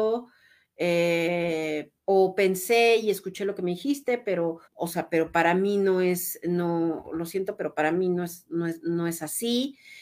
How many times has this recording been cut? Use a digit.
2